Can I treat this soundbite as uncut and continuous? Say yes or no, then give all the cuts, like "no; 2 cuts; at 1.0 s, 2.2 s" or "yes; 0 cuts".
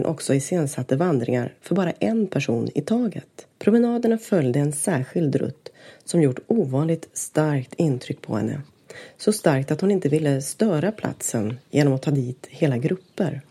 no; 1 cut; at 3.5 s